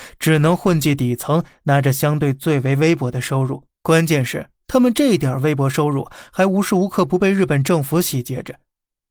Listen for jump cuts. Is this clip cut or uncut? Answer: cut